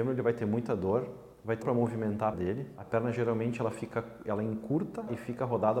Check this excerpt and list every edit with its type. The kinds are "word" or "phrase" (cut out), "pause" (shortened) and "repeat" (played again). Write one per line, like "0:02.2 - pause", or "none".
0:01.6 - word
0:02.3 - word